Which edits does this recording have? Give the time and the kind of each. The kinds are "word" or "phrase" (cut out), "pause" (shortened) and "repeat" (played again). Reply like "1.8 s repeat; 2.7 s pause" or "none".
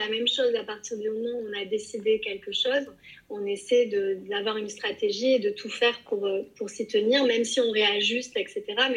none